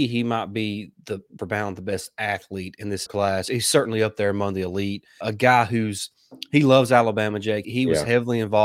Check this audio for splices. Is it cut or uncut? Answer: cut